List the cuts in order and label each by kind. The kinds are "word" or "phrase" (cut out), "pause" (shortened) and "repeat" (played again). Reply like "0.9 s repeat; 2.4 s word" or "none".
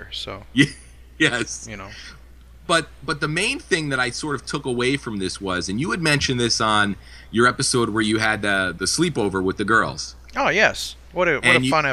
8.8 s word